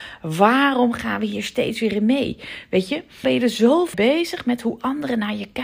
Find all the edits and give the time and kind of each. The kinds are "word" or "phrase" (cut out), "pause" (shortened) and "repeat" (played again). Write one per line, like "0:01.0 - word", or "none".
0:03.2 - word
0:03.9 - word